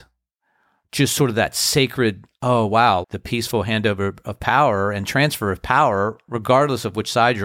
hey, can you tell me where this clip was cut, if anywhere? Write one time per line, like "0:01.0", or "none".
0:03.0